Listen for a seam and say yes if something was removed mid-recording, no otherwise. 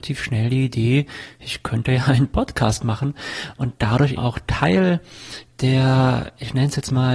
yes